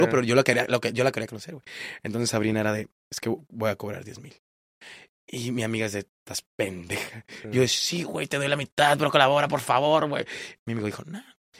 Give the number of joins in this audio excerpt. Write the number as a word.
zero